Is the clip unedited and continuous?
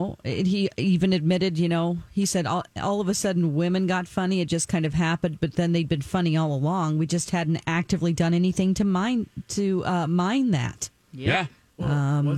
yes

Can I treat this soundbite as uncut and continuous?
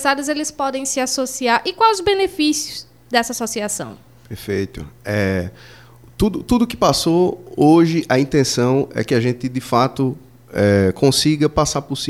yes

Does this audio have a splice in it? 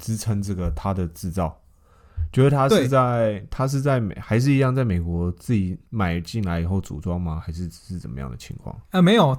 yes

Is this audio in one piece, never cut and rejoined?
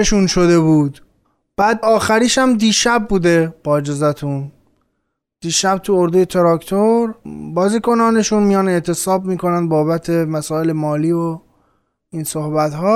no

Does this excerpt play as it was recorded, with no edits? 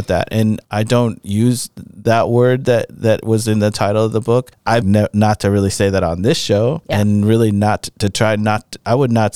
no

